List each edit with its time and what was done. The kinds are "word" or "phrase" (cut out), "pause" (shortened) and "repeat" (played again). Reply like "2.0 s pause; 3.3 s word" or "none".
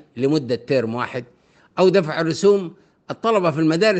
none